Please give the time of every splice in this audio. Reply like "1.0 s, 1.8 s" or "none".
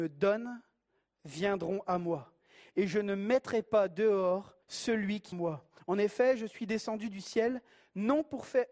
4.6 s, 5.3 s